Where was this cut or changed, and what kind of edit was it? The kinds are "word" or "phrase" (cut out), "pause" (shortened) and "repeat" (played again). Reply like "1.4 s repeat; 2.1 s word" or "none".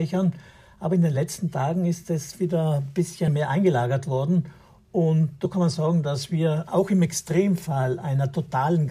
none